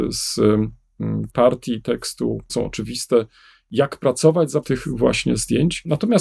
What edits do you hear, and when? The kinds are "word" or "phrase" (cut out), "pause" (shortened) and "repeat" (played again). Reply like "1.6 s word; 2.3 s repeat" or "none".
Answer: 1.3 s word; 2.5 s word; 4.6 s word